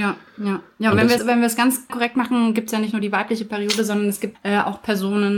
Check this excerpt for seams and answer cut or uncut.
cut